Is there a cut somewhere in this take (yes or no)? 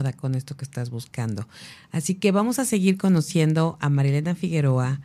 no